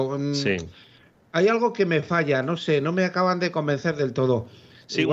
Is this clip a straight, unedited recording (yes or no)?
yes